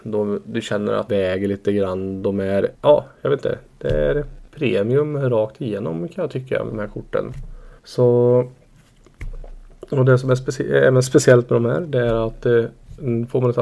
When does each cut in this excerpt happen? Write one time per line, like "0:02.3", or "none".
0:01.1
0:02.7
0:04.5
0:06.7
0:07.8